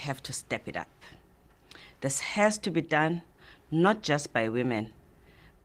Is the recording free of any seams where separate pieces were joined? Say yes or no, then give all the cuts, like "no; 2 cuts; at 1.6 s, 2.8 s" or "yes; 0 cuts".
yes; 0 cuts